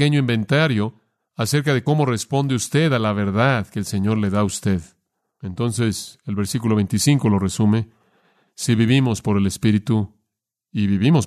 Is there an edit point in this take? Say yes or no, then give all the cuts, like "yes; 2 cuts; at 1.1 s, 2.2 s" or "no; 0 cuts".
no; 0 cuts